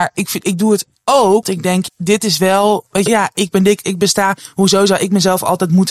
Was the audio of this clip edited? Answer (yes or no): yes